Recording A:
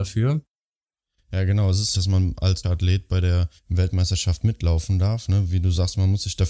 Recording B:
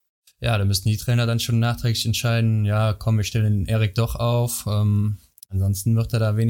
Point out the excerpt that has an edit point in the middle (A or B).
A